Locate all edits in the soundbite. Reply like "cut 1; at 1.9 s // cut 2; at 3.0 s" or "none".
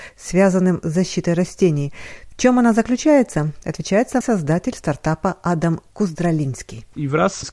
cut 1; at 4.2 s